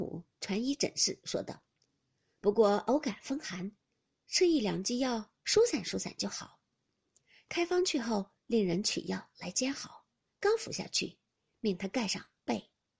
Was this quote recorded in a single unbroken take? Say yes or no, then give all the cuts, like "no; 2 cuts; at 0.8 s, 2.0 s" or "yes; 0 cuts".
no; 1 cut; at 8.4 s